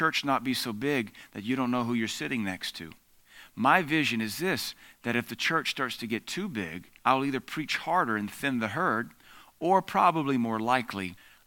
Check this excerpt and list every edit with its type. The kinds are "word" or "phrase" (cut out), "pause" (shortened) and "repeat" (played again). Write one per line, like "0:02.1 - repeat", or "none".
0:07.0 - pause

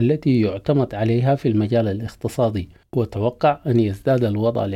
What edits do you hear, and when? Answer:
none

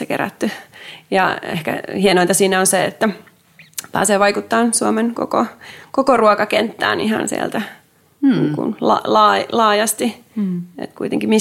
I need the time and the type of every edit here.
none

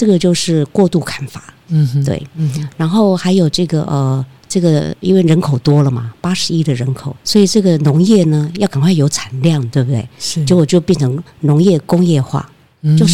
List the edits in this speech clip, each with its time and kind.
0:07.2 - pause

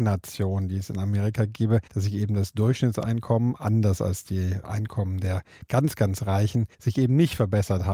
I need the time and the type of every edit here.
0:01.9 - pause
0:06.7 - pause

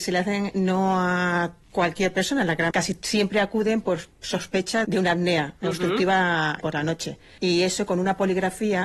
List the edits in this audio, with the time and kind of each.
0:02.7 - word
0:04.8 - word
0:06.6 - word

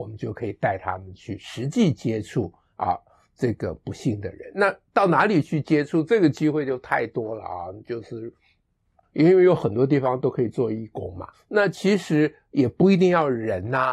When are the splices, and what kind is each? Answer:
0:09.0 - word
0:11.3 - word

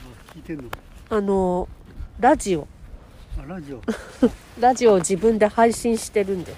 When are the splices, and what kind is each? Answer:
0:02.1 - pause

